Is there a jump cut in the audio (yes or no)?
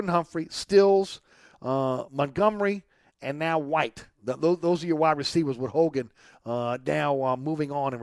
no